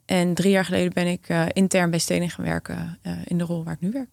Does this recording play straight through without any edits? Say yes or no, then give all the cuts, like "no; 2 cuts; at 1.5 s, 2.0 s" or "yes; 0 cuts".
yes; 0 cuts